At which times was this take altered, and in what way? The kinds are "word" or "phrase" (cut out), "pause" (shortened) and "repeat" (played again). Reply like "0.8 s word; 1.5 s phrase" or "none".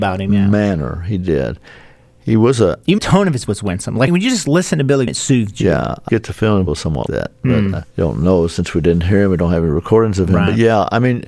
3.0 s word; 3.5 s word; 4.1 s word; 5.1 s word; 6.1 s word; 6.7 s word; 7.1 s word; 7.8 s word